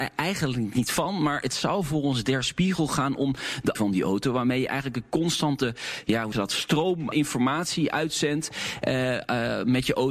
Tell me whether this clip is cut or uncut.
cut